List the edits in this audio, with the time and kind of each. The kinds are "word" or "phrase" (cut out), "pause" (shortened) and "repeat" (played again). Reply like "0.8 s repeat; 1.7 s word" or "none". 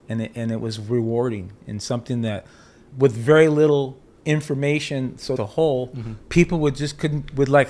2.9 s word; 4.1 s pause; 5.4 s phrase